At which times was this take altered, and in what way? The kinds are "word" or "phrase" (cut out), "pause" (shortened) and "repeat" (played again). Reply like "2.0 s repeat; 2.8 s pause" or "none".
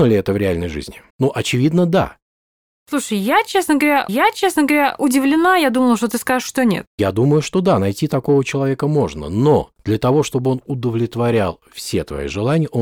1.1 s pause; 4.1 s repeat; 6.9 s pause